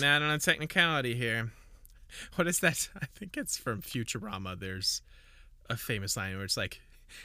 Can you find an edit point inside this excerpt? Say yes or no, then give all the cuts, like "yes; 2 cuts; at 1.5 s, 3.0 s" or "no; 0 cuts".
no; 0 cuts